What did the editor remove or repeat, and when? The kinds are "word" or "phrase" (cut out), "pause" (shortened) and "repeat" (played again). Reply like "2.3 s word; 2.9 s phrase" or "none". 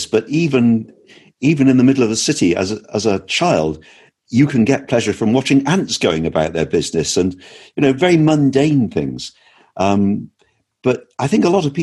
none